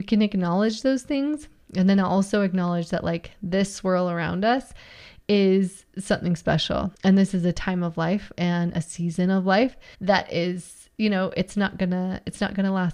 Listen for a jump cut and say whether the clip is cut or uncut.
cut